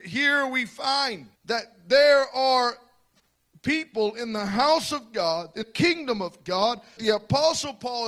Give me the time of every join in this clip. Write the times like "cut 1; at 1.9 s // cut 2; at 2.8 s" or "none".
cut 1; at 1.4 s // cut 2; at 5.6 s // cut 3; at 7.0 s